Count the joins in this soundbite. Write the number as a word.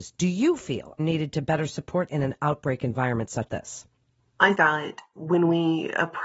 four